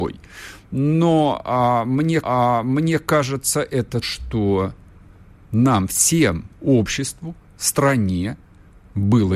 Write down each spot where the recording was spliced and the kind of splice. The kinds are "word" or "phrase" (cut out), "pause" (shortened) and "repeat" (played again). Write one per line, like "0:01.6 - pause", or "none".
0:02.2 - repeat
0:04.0 - word
0:06.5 - pause